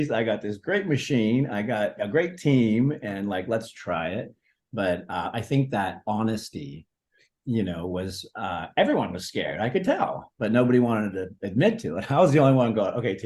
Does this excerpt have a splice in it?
no; 0 cuts

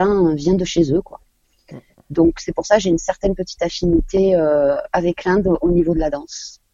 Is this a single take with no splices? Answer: yes; 0 cuts

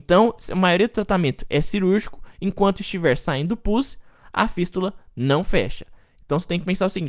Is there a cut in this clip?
no; 0 cuts

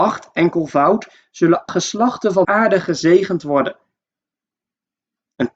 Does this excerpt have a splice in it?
yes; 2 cuts; at 1.7 s, 2.4 s

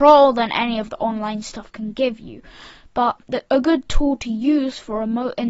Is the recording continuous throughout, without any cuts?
yes; 0 cuts

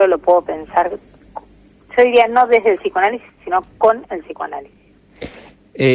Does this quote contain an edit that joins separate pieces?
no; 0 cuts

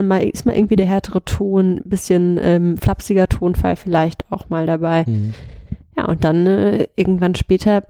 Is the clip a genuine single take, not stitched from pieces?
yes; 0 cuts

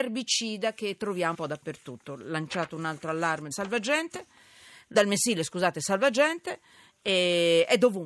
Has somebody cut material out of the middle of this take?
yes; 3 cuts; at 1.3 s, 3.5 s, 4.9 s

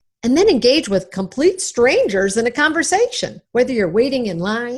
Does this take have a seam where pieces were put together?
yes; 1 cut; at 3.4 s

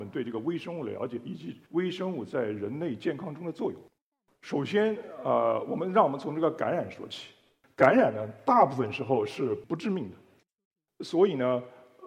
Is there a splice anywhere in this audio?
yes; 1 cut; at 1.7 s

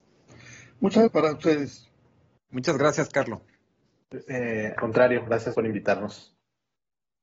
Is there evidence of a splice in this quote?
yes; 3 cuts; at 1.1 s, 4.8 s, 5.5 s

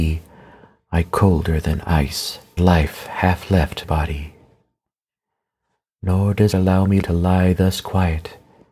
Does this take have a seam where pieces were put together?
yes; 5 cuts; at 1.0 s, 2.6 s, 3.8 s, 6.5 s, 7.0 s

